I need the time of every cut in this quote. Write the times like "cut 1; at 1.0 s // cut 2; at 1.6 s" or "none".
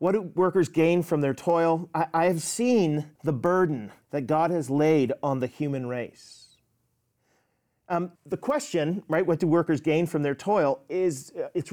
cut 1; at 3.2 s // cut 2; at 4.0 s // cut 3; at 8.2 s